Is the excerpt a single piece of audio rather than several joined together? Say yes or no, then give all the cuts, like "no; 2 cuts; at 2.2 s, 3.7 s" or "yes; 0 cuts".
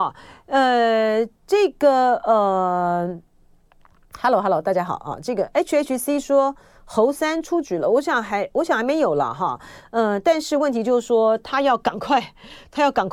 yes; 0 cuts